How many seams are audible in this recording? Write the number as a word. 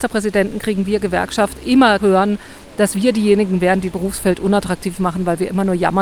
two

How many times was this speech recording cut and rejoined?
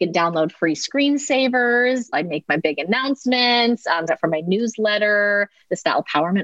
two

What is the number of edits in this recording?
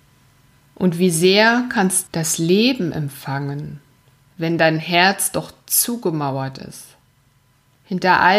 one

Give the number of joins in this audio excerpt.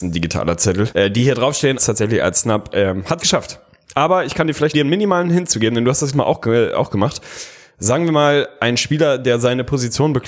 five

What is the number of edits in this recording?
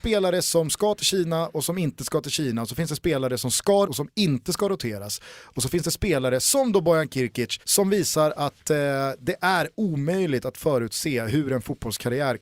two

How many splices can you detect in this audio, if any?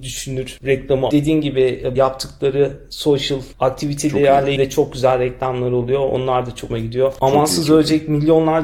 four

